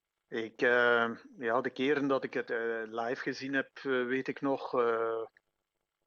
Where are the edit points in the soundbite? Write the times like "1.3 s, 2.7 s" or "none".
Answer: none